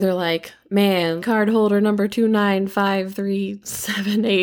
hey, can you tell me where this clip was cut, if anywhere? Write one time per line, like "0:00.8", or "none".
0:01.2